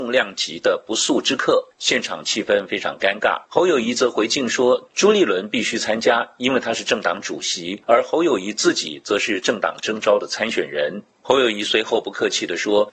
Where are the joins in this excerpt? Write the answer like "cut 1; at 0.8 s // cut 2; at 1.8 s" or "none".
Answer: cut 1; at 3.4 s